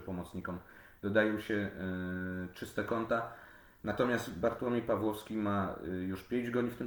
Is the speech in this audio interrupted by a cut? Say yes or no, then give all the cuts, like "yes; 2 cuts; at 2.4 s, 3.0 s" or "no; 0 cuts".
no; 0 cuts